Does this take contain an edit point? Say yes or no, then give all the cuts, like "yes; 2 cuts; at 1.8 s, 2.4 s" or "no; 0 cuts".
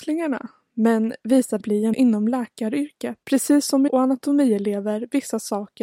yes; 4 cuts; at 1.6 s, 1.9 s, 3.2 s, 3.9 s